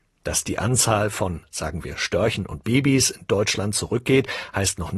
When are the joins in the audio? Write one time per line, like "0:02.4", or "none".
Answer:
none